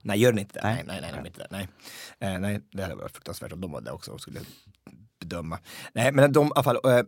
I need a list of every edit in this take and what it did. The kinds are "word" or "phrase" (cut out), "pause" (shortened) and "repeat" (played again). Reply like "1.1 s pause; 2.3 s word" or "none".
none